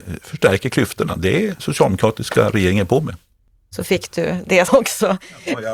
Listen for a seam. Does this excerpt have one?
yes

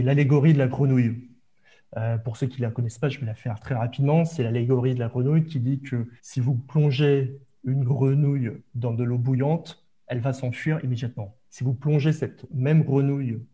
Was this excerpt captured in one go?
no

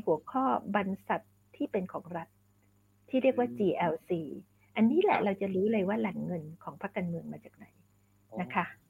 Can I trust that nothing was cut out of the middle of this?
yes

